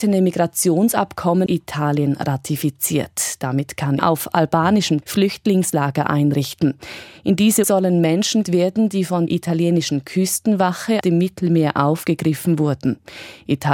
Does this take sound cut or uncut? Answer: cut